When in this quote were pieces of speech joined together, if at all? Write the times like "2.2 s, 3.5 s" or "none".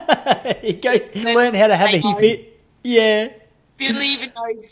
1.2 s, 2.0 s

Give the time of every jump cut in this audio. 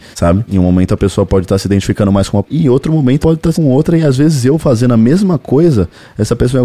2.4 s, 3.2 s, 3.5 s

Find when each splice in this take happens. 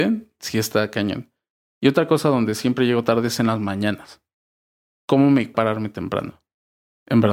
5.5 s

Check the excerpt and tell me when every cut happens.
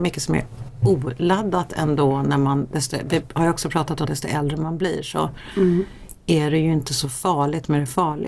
4.0 s

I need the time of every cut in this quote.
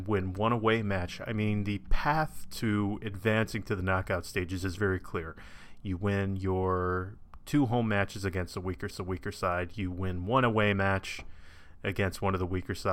4.8 s, 8.9 s

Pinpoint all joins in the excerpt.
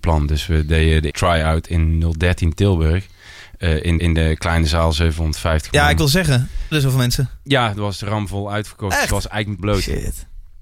1.1 s, 4.0 s, 6.7 s, 9.6 s

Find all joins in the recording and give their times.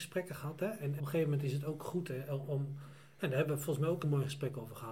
1.0 s, 4.0 s

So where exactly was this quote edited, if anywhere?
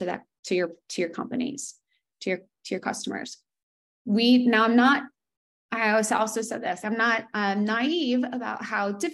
6.8 s

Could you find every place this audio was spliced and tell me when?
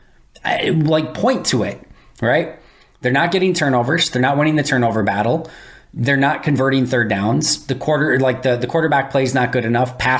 none

